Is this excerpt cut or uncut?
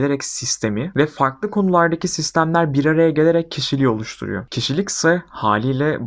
uncut